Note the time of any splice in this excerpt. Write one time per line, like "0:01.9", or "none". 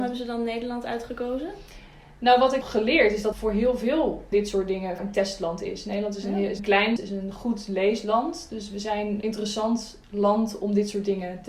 0:02.6
0:03.3
0:04.3
0:05.0
0:06.6
0:07.0
0:09.2